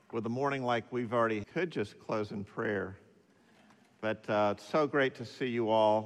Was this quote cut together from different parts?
yes; 1 cut; at 1.4 s

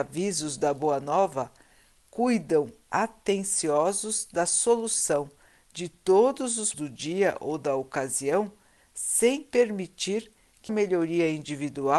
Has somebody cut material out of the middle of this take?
yes; 2 cuts; at 6.7 s, 10.7 s

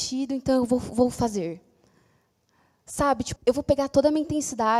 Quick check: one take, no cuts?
no; 1 cut; at 3.4 s

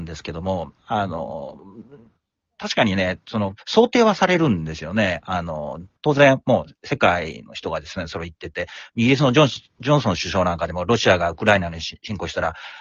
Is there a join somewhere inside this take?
no; 0 cuts

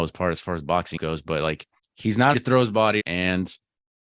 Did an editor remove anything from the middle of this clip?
yes; 4 cuts; at 1.0 s, 1.8 s, 2.3 s, 3.0 s

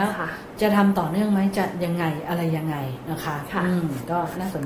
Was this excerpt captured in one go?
yes; 0 cuts

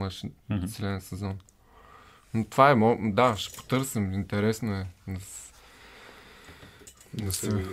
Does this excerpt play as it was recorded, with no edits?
yes; 0 cuts

